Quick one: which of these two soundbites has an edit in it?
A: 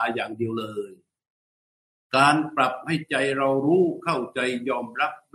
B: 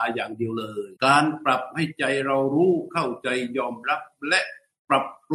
B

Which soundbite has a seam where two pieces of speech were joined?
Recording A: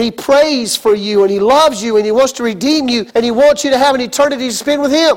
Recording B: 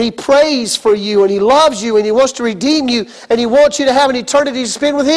A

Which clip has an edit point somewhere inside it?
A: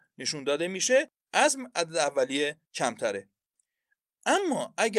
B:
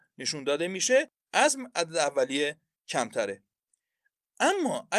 A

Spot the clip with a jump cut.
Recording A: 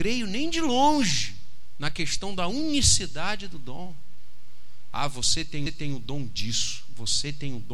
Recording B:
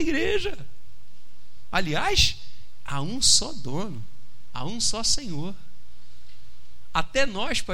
A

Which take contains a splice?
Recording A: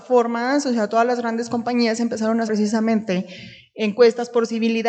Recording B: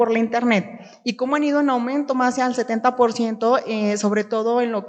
A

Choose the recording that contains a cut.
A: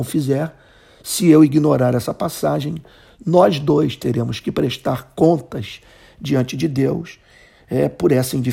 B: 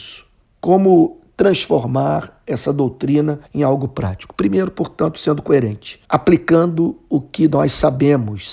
B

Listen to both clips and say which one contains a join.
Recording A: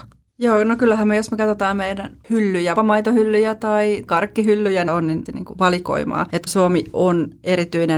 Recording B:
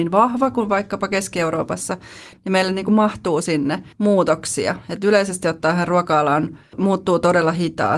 A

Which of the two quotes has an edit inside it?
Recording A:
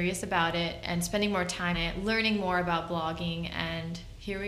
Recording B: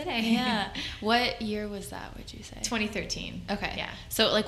A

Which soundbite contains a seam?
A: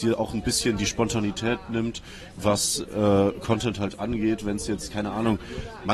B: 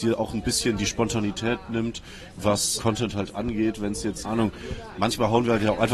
B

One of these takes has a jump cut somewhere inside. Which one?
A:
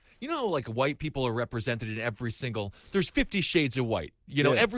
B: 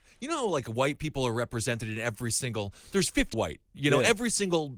B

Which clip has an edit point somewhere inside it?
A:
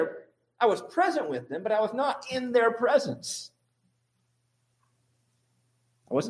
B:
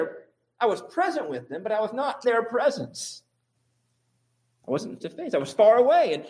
B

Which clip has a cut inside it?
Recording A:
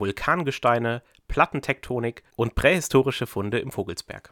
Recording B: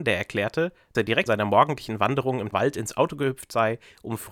B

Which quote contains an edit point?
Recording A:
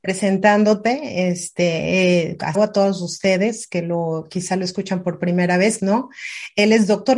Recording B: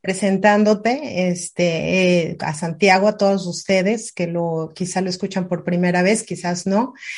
A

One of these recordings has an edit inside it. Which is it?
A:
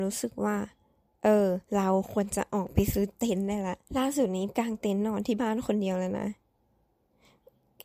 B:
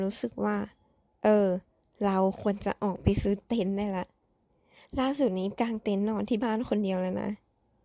A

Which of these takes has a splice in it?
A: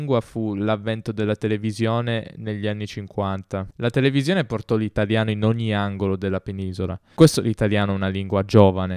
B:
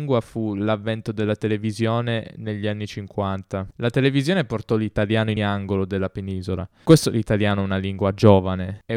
B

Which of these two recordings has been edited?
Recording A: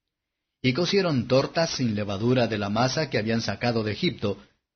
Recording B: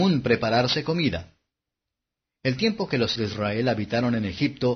B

